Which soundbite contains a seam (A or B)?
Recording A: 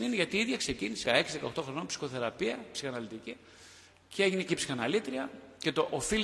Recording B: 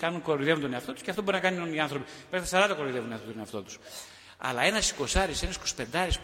A